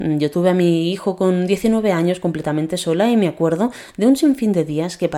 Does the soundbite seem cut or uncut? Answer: uncut